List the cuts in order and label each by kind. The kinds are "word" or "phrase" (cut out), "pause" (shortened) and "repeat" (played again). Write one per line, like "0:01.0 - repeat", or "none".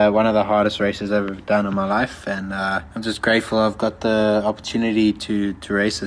0:02.9 - pause